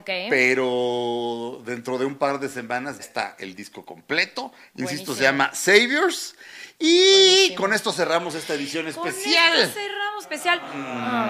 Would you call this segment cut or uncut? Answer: cut